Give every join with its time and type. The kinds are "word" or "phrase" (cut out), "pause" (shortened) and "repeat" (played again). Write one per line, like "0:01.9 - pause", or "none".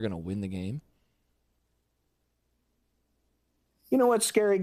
none